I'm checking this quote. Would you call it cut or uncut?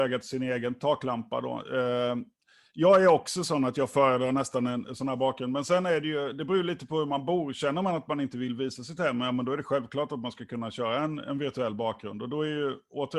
uncut